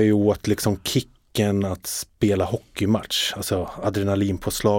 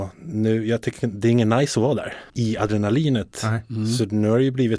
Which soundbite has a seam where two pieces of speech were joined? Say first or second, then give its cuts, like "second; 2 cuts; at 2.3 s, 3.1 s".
second; 1 cut; at 2.3 s